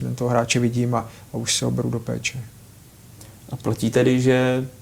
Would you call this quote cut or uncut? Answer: uncut